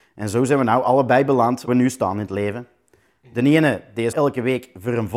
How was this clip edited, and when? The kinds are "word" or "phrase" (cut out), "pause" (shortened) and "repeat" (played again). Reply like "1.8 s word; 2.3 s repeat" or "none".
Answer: 1.7 s word; 4.1 s word